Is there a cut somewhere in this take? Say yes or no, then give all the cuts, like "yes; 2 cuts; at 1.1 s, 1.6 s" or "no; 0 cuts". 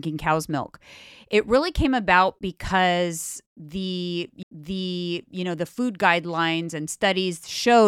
yes; 1 cut; at 4.4 s